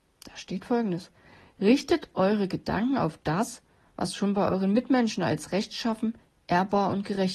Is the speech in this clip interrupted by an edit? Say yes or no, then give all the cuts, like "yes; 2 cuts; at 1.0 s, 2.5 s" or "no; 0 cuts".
no; 0 cuts